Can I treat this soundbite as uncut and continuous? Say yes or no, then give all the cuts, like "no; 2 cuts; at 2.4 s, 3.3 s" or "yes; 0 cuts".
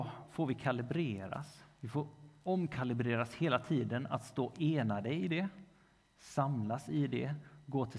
yes; 0 cuts